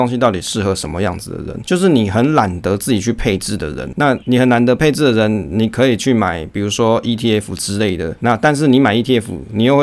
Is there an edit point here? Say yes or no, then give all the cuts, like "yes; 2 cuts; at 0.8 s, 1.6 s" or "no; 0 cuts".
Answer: no; 0 cuts